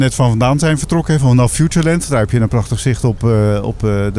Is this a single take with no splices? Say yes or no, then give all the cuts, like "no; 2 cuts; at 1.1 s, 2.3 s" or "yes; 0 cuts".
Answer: yes; 0 cuts